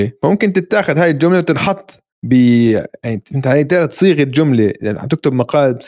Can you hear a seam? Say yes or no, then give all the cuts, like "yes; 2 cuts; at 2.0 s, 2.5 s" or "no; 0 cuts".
yes; 1 cut; at 2.1 s